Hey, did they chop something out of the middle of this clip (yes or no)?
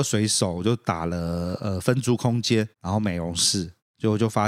yes